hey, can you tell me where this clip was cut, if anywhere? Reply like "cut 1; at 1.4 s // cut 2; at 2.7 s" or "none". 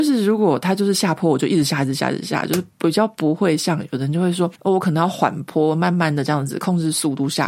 cut 1; at 4.6 s